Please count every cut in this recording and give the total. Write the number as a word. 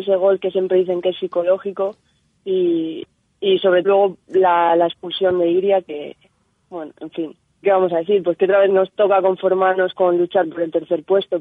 three